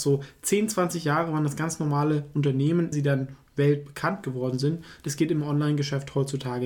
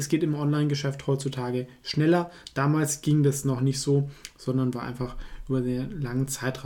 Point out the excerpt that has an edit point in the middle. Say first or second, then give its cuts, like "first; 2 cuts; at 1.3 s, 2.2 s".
first; 1 cut; at 2.9 s